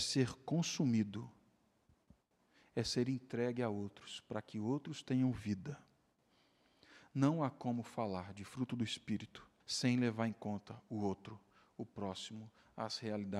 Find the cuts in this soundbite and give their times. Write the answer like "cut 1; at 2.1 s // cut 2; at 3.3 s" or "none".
cut 1; at 9.6 s